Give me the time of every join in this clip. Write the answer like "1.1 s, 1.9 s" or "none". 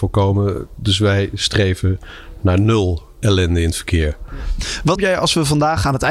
5.0 s